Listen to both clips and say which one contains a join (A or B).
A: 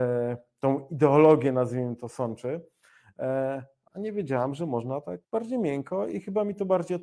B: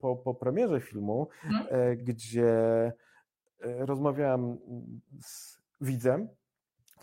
A